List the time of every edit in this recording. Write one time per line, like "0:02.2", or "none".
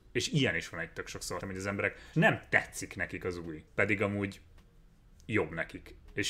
0:01.4
0:02.1
0:03.7